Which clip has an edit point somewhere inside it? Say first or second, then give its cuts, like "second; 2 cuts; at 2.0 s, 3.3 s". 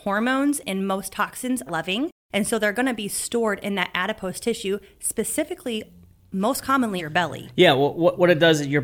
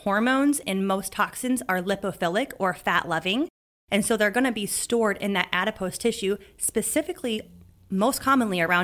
first; 3 cuts; at 1.7 s, 2.2 s, 7.0 s